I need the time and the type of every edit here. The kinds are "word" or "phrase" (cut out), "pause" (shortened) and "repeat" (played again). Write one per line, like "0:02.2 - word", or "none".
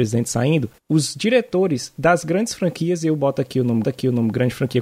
0:03.8 - repeat